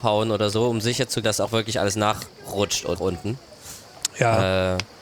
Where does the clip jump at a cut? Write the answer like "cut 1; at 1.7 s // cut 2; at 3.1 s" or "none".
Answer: cut 1; at 1.2 s // cut 2; at 3.0 s